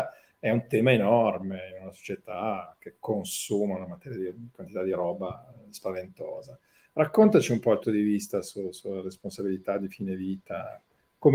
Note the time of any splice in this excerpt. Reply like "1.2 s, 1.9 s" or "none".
7.8 s